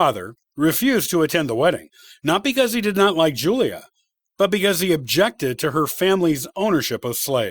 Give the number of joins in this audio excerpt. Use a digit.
0